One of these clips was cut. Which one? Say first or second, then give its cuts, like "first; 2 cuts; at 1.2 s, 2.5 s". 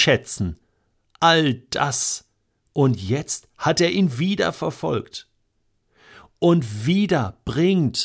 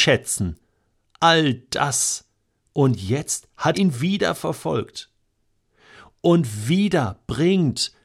second; 1 cut; at 3.7 s